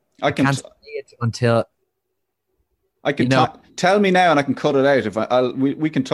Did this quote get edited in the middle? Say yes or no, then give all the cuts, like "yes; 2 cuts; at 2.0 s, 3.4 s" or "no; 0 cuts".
no; 0 cuts